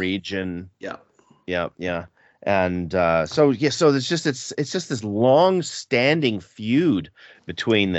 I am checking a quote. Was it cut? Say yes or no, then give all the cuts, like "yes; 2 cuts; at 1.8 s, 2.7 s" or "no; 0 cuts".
yes; 1 cut; at 1.7 s